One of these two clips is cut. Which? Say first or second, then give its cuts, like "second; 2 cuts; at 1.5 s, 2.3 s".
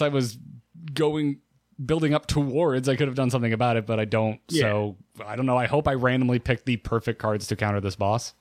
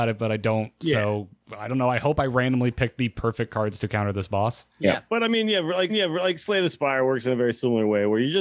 second; 2 cuts; at 4.7 s, 5.9 s